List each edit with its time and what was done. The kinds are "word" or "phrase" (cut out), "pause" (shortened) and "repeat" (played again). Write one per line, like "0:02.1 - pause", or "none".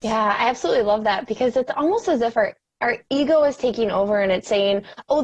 none